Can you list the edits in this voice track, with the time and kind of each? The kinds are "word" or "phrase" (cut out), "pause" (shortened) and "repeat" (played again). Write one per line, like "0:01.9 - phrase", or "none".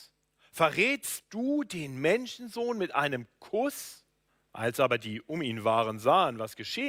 0:04.3 - pause